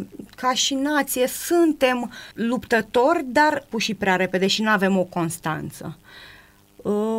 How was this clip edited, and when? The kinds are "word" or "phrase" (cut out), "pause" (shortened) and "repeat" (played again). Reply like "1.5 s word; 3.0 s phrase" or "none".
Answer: 2.3 s pause; 3.7 s phrase